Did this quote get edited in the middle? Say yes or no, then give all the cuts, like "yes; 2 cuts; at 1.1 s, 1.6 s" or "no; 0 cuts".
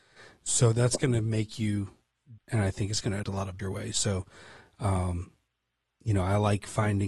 yes; 3 cuts; at 2.4 s, 3.2 s, 3.6 s